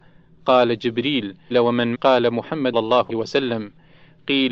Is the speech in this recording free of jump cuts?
no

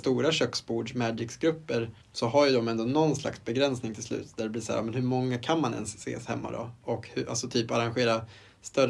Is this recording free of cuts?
no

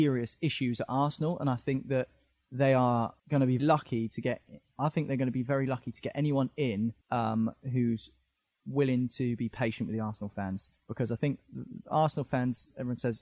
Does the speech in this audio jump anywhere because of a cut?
yes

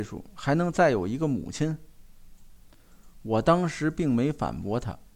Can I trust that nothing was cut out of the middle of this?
no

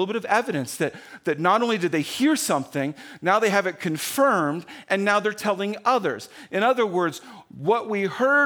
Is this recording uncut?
yes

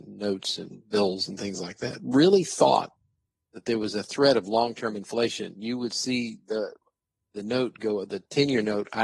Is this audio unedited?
yes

